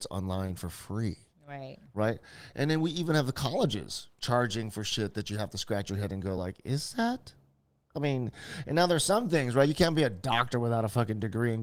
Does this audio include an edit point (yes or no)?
no